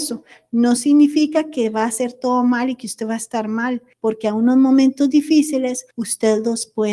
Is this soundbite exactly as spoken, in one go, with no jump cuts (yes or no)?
no